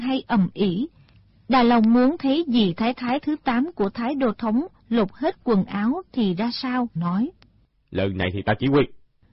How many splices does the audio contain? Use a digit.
1